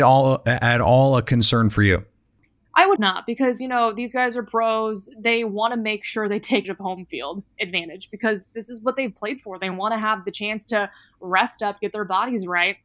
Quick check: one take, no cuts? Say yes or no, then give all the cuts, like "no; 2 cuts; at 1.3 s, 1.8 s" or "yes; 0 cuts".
no; 2 cuts; at 3.0 s, 6.6 s